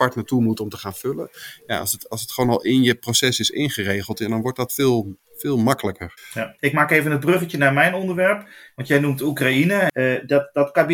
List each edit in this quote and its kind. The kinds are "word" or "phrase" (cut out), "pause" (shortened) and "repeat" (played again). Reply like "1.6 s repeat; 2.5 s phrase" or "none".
none